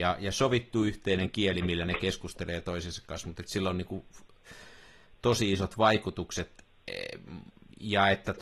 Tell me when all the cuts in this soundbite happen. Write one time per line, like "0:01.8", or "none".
none